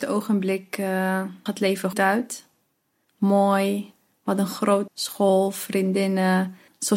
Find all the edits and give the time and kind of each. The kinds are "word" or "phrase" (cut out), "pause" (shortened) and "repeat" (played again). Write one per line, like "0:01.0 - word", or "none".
0:01.5 - word
0:01.9 - word
0:04.9 - word